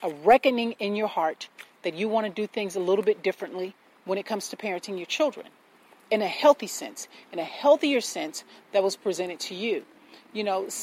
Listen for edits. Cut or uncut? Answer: uncut